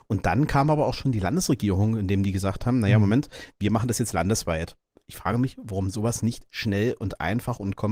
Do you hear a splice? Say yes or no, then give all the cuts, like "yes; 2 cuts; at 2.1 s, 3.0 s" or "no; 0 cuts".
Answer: no; 0 cuts